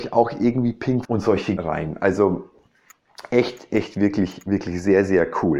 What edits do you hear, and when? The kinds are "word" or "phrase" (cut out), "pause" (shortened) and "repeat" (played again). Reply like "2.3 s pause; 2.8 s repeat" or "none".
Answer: 1.0 s word; 1.6 s word; 3.7 s word